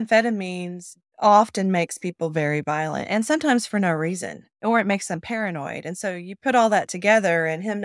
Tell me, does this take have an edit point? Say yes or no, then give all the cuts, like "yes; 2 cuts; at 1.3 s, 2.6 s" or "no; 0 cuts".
no; 0 cuts